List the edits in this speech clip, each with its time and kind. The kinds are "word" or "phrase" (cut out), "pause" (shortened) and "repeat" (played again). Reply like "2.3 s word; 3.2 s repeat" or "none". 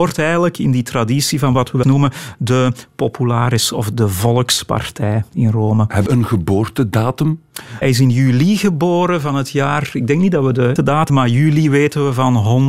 1.8 s word; 3.9 s word; 6.1 s word; 7.8 s word; 10.8 s word; 11.1 s word